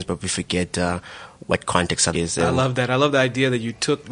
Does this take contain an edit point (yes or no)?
yes